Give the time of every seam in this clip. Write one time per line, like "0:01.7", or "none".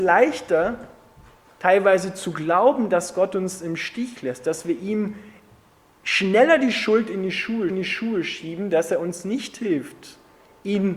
0:07.7